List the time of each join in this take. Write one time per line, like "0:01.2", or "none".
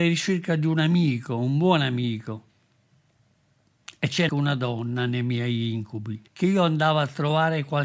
0:04.3
0:06.3